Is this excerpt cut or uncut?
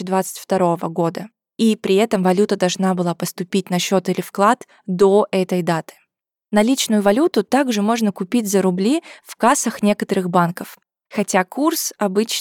uncut